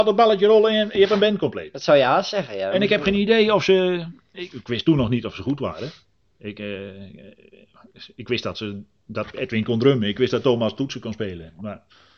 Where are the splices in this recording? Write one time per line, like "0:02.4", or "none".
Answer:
none